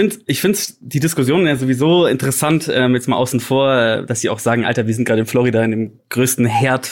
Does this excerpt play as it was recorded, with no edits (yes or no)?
yes